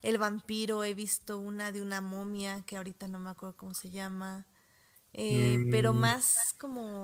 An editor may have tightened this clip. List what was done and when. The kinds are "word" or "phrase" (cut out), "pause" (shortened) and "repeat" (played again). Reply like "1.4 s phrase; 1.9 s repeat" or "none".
none

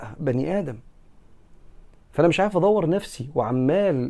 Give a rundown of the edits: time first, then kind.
none

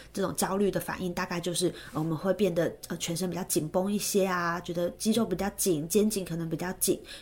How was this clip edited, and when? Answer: none

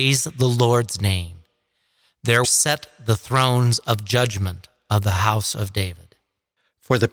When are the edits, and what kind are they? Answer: 2.4 s word

